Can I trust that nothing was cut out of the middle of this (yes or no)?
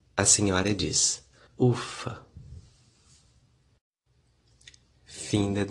no